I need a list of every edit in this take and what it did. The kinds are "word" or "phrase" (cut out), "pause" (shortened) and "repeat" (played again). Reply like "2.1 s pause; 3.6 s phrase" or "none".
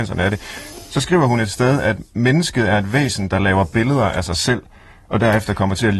none